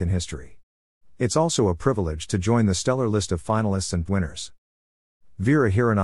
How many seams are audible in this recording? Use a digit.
1